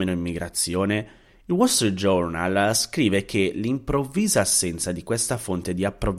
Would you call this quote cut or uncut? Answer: uncut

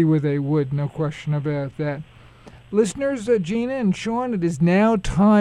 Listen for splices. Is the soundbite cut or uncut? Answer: uncut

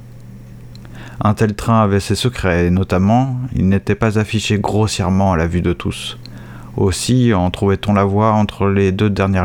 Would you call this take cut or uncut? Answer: uncut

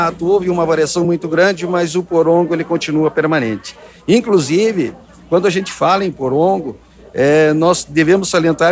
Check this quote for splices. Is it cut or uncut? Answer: uncut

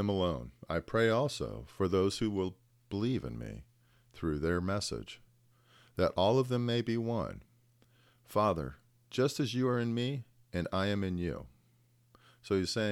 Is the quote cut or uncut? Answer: uncut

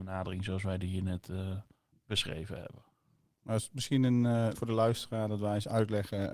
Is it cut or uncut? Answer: cut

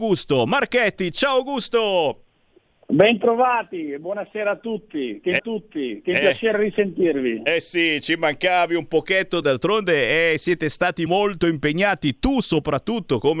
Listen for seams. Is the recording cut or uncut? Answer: cut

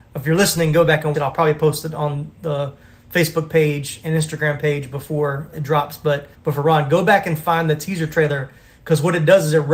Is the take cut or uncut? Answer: cut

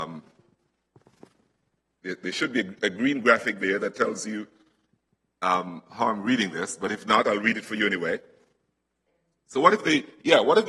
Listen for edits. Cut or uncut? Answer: uncut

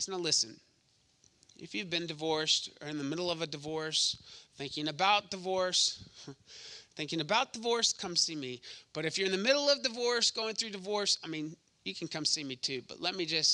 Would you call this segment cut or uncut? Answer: uncut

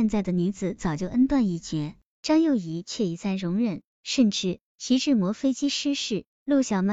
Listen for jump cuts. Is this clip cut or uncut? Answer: cut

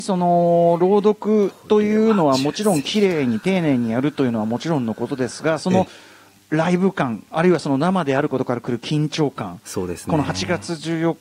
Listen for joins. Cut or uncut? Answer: uncut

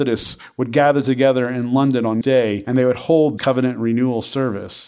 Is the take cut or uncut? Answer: cut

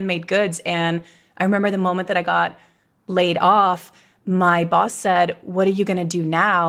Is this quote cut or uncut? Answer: uncut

